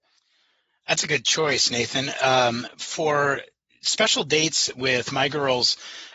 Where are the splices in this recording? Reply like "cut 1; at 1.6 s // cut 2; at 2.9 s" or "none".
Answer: none